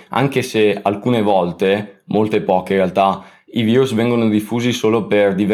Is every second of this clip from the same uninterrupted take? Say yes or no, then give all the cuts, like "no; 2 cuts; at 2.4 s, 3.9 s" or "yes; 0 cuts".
yes; 0 cuts